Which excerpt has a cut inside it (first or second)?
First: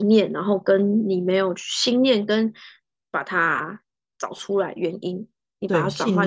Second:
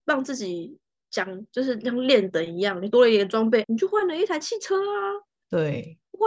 second